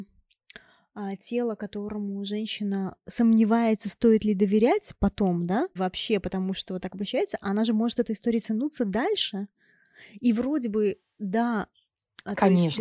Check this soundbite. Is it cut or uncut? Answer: cut